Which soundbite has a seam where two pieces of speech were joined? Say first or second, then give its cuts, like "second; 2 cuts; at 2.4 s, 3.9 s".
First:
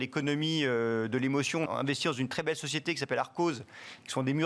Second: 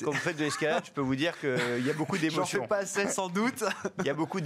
first; 1 cut; at 1.7 s